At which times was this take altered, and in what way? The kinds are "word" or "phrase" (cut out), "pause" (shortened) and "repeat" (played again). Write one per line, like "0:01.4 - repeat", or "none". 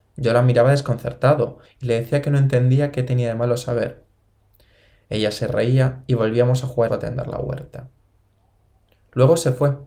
0:06.9 - phrase